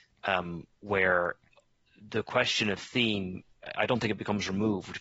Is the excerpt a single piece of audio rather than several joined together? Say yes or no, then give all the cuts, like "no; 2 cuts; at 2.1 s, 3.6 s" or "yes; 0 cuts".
yes; 0 cuts